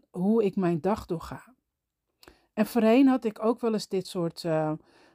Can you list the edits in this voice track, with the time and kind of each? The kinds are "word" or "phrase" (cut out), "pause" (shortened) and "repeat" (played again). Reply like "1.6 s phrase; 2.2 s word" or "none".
none